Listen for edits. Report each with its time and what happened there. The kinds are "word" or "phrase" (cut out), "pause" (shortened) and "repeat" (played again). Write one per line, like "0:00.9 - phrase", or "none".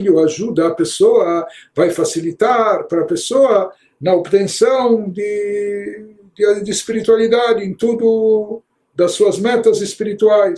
none